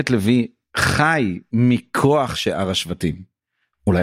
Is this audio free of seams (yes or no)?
yes